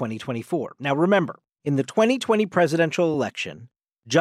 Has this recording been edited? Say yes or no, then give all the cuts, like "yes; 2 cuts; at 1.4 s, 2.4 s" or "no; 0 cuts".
no; 0 cuts